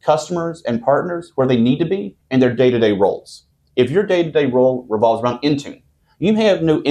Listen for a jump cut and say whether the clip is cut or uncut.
uncut